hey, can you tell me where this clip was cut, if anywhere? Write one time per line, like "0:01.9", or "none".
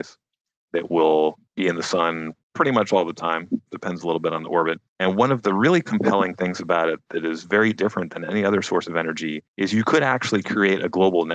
0:01.5
0:02.4
0:04.9
0:09.5